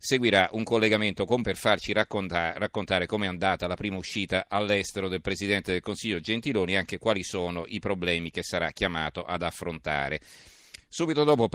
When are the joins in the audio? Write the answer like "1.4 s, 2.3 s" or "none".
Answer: 1.4 s